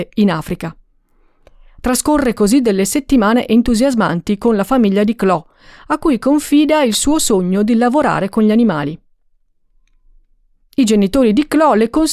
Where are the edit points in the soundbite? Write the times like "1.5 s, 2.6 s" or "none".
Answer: none